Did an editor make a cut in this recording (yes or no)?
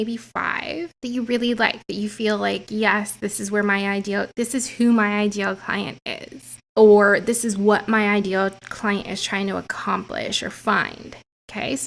no